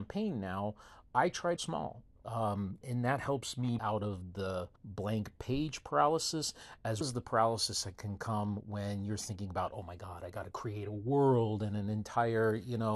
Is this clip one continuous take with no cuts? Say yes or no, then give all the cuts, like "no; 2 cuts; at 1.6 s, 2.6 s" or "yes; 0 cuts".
no; 5 cuts; at 1.6 s, 2.8 s, 3.8 s, 4.8 s, 7.0 s